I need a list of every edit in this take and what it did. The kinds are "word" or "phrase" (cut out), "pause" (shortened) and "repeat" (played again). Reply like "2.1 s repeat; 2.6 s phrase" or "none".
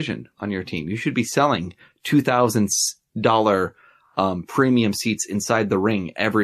none